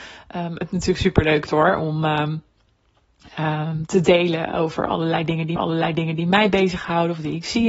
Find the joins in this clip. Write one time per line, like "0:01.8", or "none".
0:01.5
0:05.6